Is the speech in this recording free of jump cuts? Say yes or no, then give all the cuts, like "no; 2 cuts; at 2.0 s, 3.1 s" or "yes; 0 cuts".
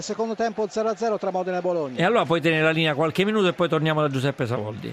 yes; 0 cuts